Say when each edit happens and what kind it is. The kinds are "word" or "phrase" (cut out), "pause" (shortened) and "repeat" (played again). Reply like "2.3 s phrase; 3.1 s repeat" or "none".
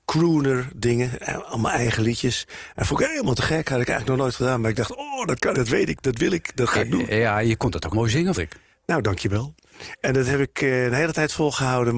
5.5 s word; 7.9 s word; 8.3 s word